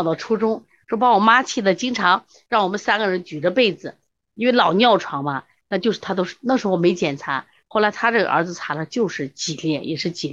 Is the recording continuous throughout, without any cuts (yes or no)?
yes